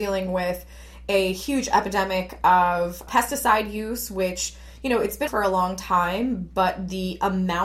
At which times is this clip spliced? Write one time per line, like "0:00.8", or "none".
0:03.1
0:05.3